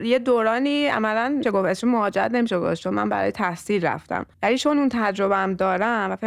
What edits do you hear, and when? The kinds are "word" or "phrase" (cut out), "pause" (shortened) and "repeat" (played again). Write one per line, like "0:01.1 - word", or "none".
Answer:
0:01.4 - word
0:04.3 - pause